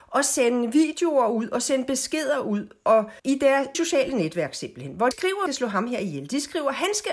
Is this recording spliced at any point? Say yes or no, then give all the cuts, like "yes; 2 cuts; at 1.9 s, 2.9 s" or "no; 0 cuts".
yes; 4 cuts; at 3.2 s, 3.7 s, 5.1 s, 5.5 s